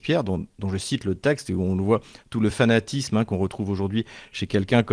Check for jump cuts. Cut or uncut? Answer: uncut